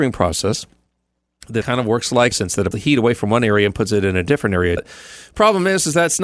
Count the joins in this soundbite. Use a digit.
4